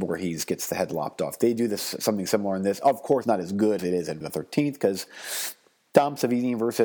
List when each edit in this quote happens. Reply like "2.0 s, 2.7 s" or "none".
3.2 s, 3.8 s, 4.2 s

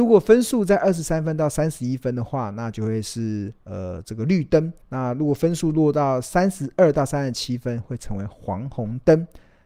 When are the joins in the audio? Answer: 4.8 s

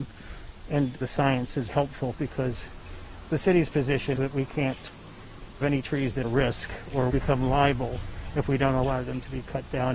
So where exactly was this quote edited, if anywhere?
1.0 s, 1.7 s, 4.1 s, 5.6 s, 6.2 s, 7.1 s

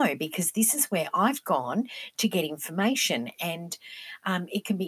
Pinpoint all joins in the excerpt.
none

